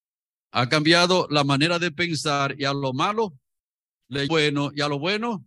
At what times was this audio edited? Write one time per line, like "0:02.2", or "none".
0:04.3